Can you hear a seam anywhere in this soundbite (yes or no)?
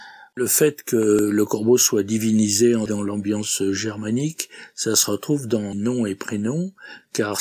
yes